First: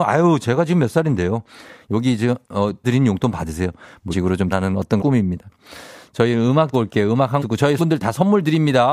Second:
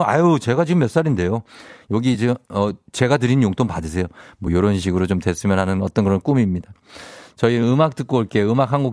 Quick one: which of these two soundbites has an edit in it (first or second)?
first